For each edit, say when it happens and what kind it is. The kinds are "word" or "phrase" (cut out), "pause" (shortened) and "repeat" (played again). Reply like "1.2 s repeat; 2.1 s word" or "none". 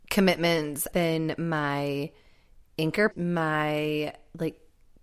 0.9 s word; 3.1 s phrase